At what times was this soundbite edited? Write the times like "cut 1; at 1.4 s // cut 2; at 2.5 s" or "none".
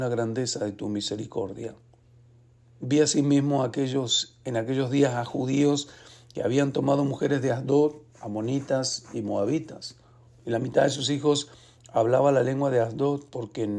none